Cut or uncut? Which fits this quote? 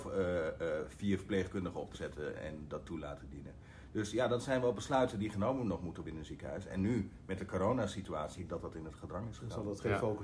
cut